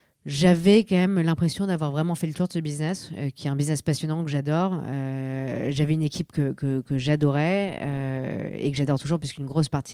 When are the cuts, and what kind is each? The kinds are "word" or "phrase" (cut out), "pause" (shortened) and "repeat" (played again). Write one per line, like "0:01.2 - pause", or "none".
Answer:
none